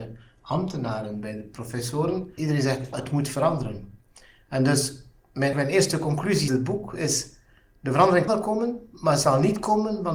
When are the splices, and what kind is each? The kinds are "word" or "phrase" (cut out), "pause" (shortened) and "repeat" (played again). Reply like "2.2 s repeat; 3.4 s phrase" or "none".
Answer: 2.4 s word; 2.9 s word; 5.5 s word; 6.5 s word; 8.3 s word